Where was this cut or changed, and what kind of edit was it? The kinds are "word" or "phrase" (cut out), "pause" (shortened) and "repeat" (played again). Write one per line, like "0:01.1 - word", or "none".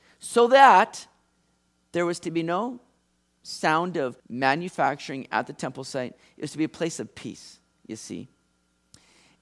0:04.2 - pause